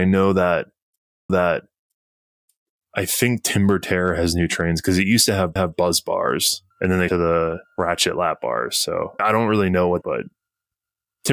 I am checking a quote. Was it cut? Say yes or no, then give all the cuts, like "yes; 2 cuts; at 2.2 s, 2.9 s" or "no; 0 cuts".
yes; 7 cuts; at 1.3 s, 5.6 s, 6.7 s, 7.1 s, 7.7 s, 9.2 s, 10.0 s